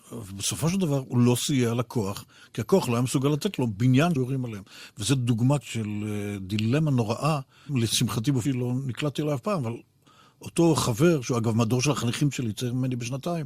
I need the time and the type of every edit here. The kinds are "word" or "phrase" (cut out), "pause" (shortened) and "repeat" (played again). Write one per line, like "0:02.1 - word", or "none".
0:04.2 - word
0:05.6 - word
0:07.7 - word
0:08.4 - word